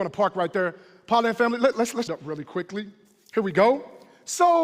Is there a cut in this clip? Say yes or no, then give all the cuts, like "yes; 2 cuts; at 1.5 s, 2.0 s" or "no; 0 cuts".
yes; 2 cuts; at 1.7 s, 2.1 s